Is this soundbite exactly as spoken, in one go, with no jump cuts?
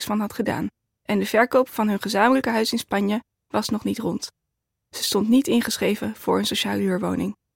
yes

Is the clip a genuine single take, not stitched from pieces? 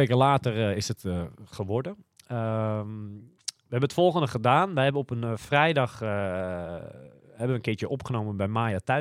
yes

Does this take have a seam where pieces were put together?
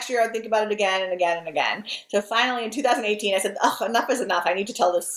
no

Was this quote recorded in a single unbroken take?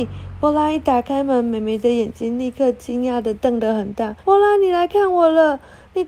no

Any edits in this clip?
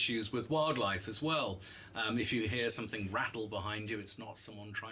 no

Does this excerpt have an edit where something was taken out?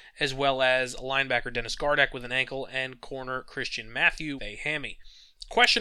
yes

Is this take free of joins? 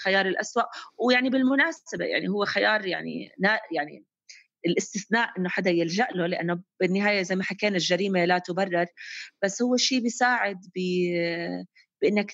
yes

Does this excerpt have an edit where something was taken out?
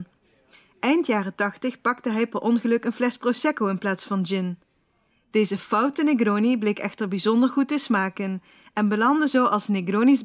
no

